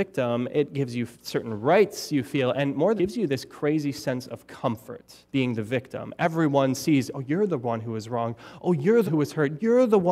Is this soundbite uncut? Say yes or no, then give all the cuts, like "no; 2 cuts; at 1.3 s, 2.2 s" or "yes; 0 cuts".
no; 4 cuts; at 1.1 s, 3.0 s, 5.3 s, 9.1 s